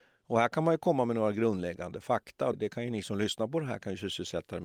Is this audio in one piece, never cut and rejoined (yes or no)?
no